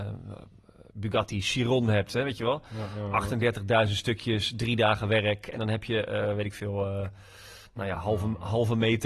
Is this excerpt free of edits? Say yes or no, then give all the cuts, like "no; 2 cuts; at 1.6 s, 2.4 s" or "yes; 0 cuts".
yes; 0 cuts